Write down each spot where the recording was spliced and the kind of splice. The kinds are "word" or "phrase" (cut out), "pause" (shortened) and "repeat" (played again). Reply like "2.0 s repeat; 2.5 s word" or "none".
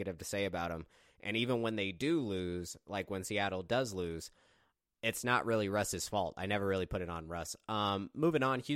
none